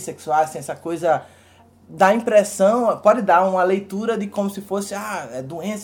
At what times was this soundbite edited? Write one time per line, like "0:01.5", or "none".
none